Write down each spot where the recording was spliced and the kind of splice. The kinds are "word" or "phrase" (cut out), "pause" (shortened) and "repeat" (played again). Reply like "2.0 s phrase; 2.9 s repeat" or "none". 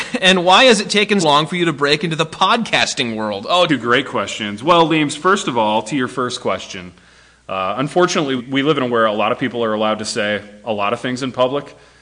1.2 s word; 3.7 s word; 8.4 s word; 8.9 s word

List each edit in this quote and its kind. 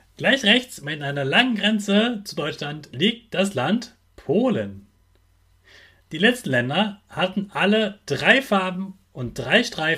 none

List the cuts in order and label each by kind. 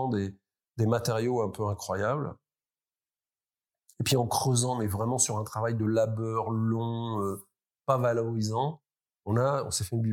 none

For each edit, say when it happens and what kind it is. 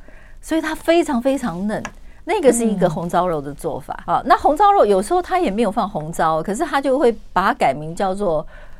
4.0 s word

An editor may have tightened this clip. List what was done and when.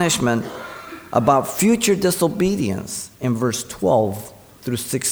3.1 s pause

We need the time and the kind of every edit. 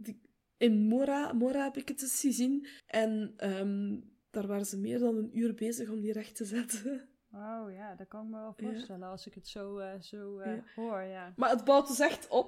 2.8 s pause

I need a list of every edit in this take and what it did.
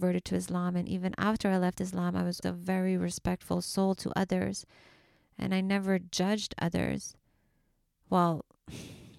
2.4 s word

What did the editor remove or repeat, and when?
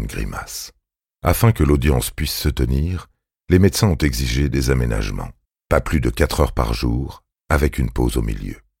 1.0 s pause; 5.4 s pause

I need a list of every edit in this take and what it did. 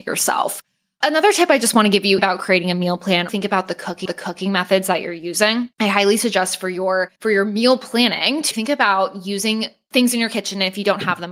2.2 s phrase; 3.3 s word; 4.1 s repeat; 5.7 s pause; 7.2 s pause; 8.5 s word

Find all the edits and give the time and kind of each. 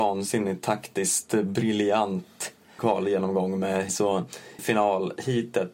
2.8 s word; 3.9 s word; 4.6 s word

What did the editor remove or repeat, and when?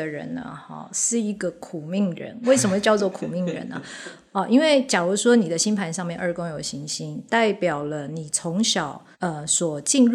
9.1 s pause

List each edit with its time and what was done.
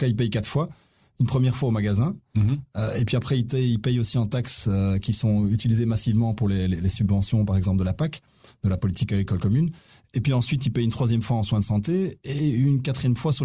none

